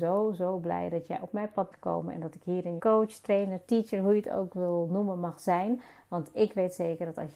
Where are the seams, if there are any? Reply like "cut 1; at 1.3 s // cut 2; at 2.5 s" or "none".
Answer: cut 1; at 1.7 s // cut 2; at 2.8 s